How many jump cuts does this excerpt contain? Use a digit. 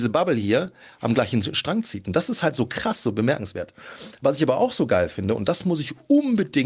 0